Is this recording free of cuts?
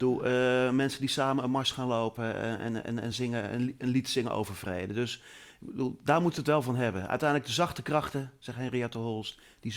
yes; 0 cuts

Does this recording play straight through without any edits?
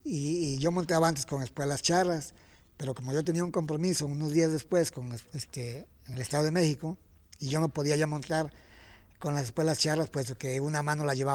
yes; 0 cuts

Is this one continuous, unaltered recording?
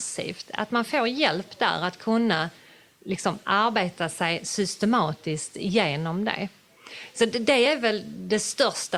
yes; 0 cuts

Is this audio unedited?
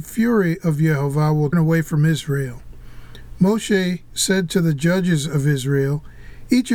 no; 1 cut; at 1.5 s

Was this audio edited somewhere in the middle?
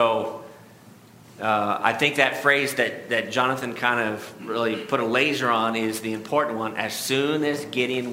no; 0 cuts

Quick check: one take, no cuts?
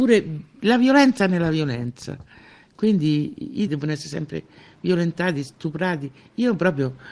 no; 1 cut; at 3.7 s

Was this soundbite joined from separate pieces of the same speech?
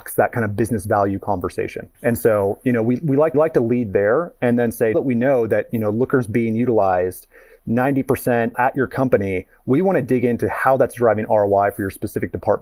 yes; 4 cuts; at 1.9 s, 3.3 s, 4.9 s, 8.5 s

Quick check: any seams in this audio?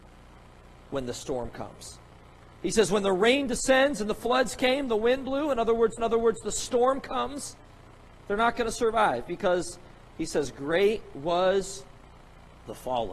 yes; 1 cut; at 6.0 s

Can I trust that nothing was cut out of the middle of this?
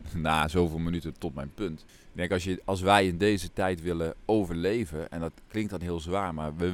no; 1 cut; at 1.9 s

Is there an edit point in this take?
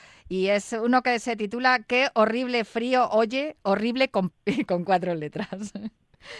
yes; 1 cut; at 4.3 s

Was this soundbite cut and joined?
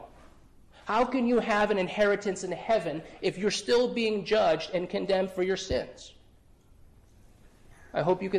no; 0 cuts

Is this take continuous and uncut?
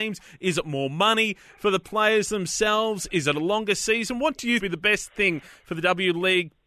no; 1 cut; at 4.6 s

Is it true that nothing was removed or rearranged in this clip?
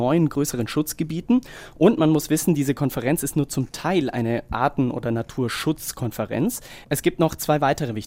yes; 0 cuts

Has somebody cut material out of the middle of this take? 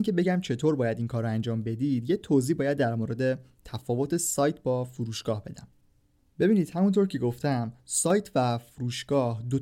no; 0 cuts

